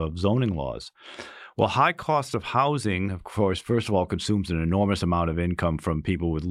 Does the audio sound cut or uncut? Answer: uncut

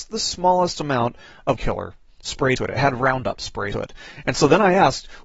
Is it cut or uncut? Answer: cut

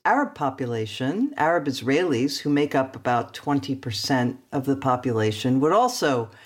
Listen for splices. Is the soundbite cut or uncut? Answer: uncut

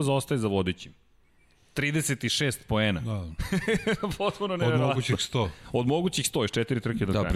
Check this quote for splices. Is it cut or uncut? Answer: uncut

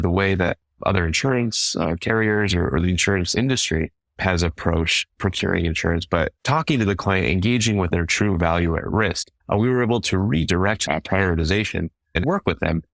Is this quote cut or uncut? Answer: cut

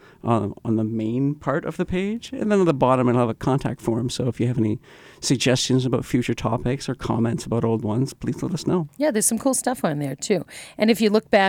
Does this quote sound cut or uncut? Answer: uncut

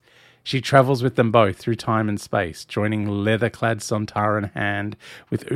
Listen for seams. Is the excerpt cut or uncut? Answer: uncut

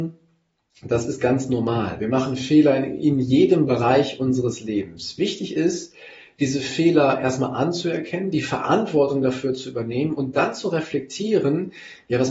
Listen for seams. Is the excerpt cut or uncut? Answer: uncut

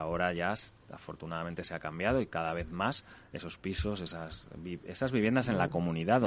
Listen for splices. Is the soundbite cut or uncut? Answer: uncut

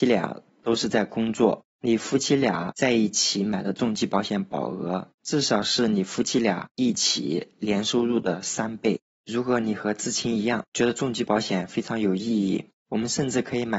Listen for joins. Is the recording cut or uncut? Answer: cut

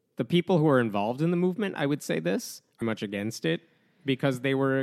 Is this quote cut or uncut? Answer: cut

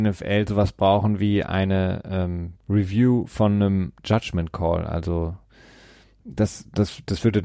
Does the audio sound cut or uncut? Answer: cut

